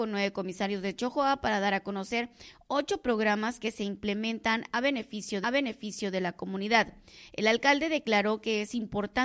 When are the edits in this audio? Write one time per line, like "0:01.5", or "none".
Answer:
0:05.4